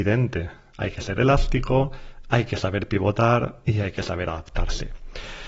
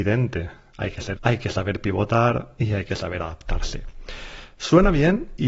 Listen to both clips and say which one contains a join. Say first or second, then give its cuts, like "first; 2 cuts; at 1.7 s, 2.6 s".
second; 1 cut; at 1.2 s